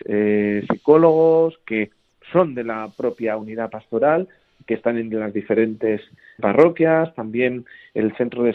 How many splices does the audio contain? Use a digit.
1